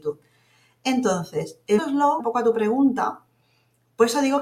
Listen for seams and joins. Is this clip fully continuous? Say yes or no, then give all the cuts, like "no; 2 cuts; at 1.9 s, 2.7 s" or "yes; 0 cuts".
no; 2 cuts; at 1.8 s, 2.2 s